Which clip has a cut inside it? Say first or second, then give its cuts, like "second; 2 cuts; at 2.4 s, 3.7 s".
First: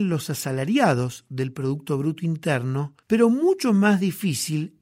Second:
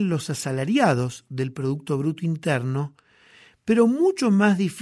first; 1 cut; at 3.0 s